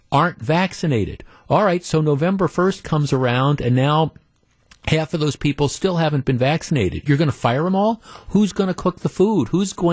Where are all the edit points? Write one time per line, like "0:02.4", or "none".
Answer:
none